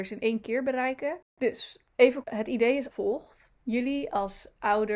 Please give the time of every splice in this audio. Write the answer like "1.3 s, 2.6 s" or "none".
2.2 s, 2.9 s